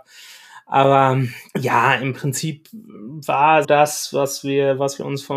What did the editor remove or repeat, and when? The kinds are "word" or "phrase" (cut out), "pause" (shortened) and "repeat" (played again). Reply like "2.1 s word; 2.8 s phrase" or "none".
1.5 s pause; 3.6 s word